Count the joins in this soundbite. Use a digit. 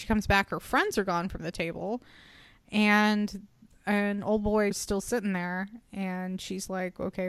1